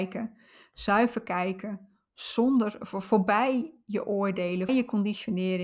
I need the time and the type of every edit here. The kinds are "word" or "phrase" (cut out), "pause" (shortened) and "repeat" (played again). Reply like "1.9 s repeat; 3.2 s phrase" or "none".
4.7 s word